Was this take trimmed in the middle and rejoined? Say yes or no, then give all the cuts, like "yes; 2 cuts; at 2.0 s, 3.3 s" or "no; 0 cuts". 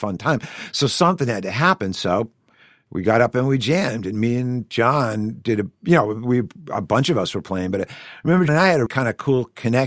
yes; 2 cuts; at 8.5 s, 8.9 s